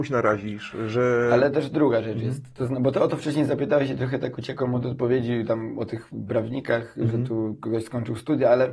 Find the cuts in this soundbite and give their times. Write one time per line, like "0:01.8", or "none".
none